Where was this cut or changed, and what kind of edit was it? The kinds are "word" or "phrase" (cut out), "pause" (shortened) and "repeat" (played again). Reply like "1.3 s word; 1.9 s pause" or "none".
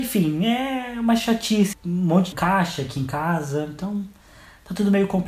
1.7 s word; 2.3 s phrase